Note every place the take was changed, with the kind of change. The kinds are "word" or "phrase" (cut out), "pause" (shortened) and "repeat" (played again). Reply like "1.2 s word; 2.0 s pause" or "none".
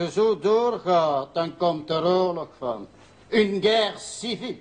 none

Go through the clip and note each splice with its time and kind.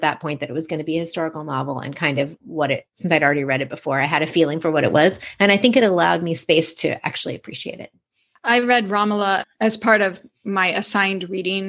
none

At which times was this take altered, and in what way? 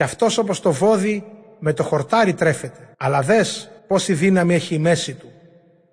2.9 s pause; 3.8 s pause

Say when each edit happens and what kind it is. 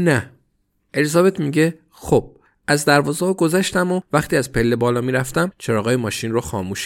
none

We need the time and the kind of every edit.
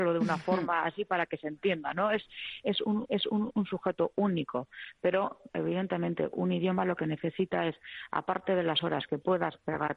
3.1 s repeat; 5.5 s word

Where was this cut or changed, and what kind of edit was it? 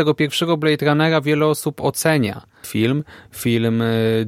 2.6 s word

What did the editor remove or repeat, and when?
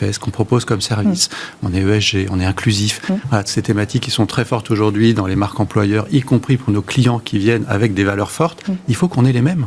none

